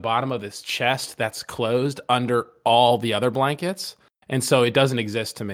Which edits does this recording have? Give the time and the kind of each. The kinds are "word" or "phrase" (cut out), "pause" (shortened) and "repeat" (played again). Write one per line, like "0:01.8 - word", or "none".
none